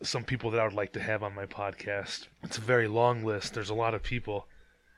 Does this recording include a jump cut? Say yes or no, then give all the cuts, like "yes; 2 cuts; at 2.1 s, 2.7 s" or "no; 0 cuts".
yes; 1 cut; at 2.3 s